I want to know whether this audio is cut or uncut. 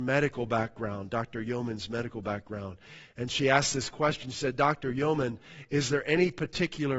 uncut